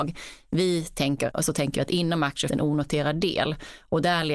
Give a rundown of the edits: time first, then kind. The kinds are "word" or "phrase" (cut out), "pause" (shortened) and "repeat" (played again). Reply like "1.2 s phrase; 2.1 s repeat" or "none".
1.3 s word; 2.5 s word